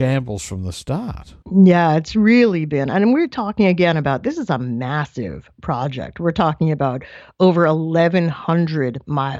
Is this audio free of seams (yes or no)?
no